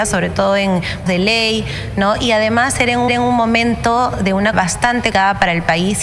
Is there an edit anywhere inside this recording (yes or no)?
yes